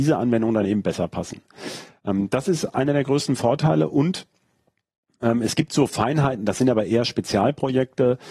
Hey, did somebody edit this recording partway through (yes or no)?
no